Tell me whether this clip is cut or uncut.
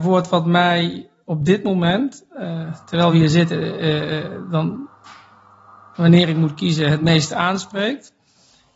uncut